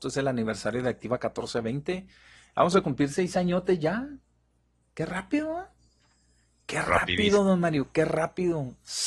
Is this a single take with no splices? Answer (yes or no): yes